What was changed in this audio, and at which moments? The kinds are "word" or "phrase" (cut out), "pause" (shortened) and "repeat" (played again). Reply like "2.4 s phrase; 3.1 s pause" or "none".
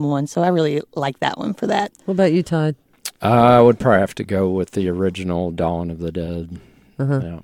3.1 s pause